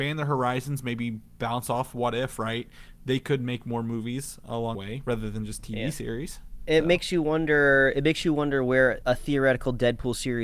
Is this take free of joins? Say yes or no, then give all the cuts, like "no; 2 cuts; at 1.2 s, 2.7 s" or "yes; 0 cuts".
no; 2 cuts; at 4.7 s, 9.0 s